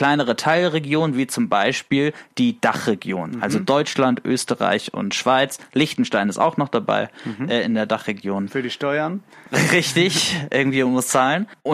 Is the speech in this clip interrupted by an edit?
no; 0 cuts

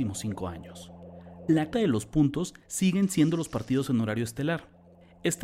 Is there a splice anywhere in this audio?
yes; 2 cuts; at 1.7 s, 2.6 s

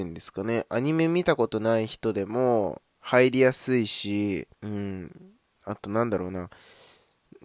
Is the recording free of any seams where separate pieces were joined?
no; 2 cuts; at 2.9 s, 4.5 s

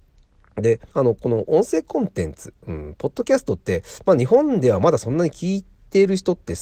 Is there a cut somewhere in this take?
yes; 1 cut; at 0.9 s

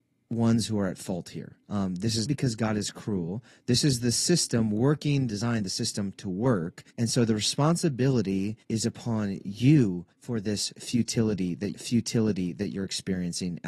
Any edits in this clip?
yes; 7 cuts; at 1.6 s, 2.3 s, 5.3 s, 6.9 s, 8.6 s, 10.1 s, 11.7 s

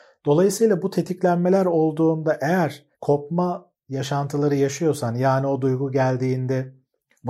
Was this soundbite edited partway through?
yes; 1 cut; at 2.9 s

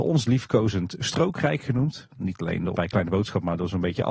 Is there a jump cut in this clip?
yes; 1 cut; at 2.7 s

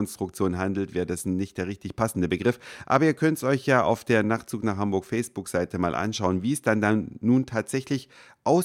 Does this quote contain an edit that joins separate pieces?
no; 0 cuts

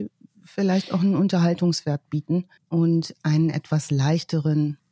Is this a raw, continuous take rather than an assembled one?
no; 1 cut; at 2.6 s

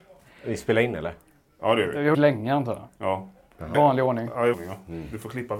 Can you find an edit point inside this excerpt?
yes; 3 cuts; at 2.1 s, 3.7 s, 4.5 s

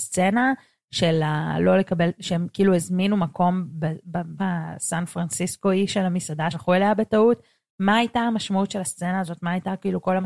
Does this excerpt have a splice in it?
yes; 2 cuts; at 4.4 s, 6.5 s

